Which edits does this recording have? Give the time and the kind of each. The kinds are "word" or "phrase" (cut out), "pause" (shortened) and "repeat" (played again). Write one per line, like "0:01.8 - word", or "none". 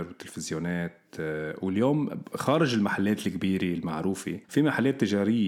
none